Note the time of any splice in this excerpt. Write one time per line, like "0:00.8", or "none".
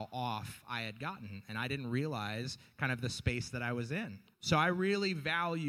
0:04.3